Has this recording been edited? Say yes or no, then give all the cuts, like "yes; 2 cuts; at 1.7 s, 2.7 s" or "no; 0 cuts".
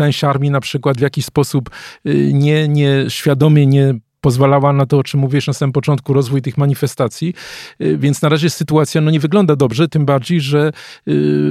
no; 0 cuts